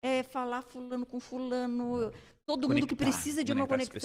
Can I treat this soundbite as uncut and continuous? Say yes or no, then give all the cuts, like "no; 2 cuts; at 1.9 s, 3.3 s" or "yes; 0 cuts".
yes; 0 cuts